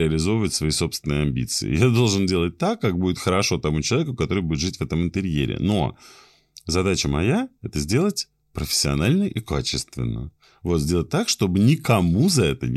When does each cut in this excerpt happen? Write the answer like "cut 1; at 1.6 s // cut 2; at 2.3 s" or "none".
none